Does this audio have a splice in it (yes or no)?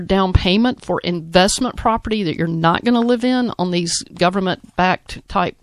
no